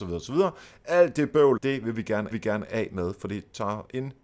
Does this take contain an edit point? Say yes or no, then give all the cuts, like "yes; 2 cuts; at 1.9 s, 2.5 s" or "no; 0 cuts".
yes; 2 cuts; at 1.6 s, 2.3 s